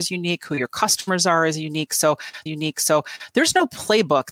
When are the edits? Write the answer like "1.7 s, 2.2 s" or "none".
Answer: 2.5 s